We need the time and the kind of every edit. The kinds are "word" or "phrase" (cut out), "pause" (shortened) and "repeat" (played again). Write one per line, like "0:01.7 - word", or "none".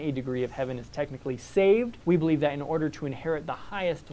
0:02.0 - pause